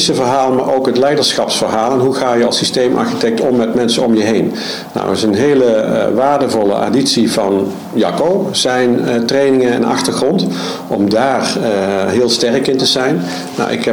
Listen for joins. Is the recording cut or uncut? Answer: uncut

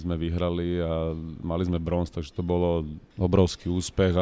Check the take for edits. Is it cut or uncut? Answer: uncut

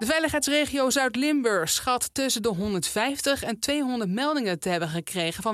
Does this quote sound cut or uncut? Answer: uncut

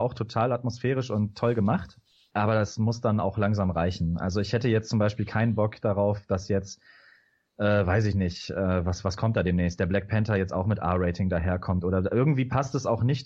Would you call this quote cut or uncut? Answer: uncut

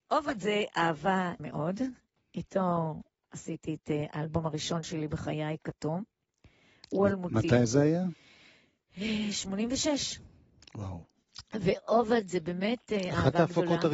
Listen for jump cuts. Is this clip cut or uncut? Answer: cut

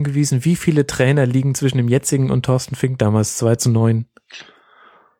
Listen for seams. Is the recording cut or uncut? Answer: uncut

